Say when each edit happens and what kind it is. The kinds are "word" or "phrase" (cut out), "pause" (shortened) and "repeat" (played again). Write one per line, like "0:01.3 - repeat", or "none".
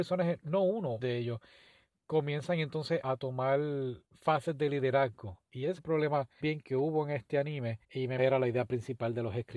0:01.0 - word
0:03.0 - word
0:04.0 - pause
0:05.8 - word
0:06.4 - word
0:07.8 - pause
0:08.2 - phrase